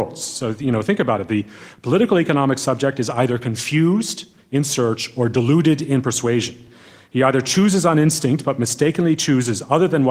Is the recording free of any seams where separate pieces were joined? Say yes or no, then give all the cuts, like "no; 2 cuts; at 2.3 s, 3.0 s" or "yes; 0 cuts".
yes; 0 cuts